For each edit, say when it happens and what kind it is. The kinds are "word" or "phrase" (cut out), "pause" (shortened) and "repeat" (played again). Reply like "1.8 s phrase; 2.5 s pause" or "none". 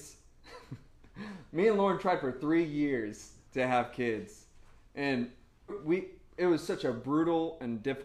3.5 s pause; 5.7 s word